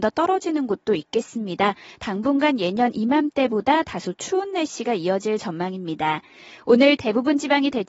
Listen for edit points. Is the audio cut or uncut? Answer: uncut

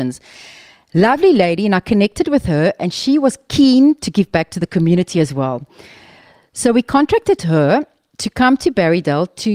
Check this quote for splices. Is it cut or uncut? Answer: uncut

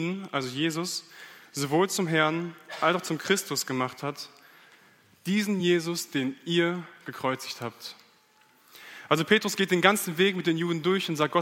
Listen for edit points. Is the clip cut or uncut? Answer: uncut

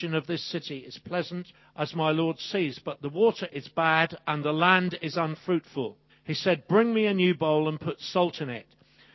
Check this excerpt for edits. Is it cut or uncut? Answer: cut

